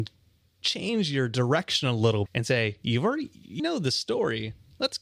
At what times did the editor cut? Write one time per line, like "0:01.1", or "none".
0:02.3
0:03.6